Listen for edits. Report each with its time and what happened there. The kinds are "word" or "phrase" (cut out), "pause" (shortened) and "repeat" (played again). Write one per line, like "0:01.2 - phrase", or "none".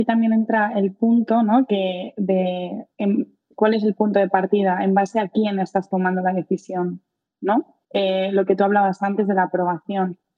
0:02.9 - pause
0:07.8 - pause